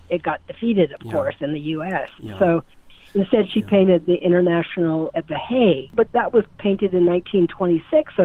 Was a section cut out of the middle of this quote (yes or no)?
yes